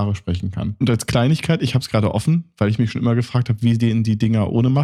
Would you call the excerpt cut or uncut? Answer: uncut